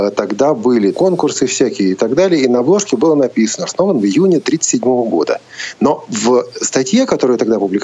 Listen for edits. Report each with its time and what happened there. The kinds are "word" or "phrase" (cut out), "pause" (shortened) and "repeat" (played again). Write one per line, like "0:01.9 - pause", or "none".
0:00.9 - word
0:03.7 - word